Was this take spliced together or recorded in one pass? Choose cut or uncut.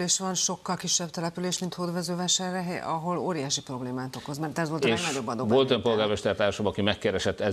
uncut